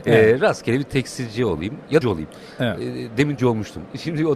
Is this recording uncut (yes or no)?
no